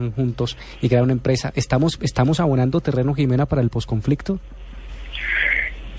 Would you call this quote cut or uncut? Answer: uncut